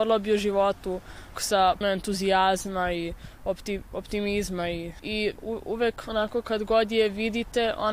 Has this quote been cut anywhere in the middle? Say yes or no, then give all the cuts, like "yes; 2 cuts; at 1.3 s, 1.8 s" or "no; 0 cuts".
yes; 4 cuts; at 1.3 s, 1.8 s, 5.0 s, 5.4 s